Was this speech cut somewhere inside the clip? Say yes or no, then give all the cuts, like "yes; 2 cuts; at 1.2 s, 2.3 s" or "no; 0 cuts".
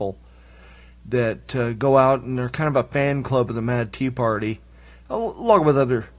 no; 0 cuts